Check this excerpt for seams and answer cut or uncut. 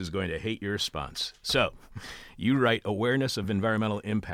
uncut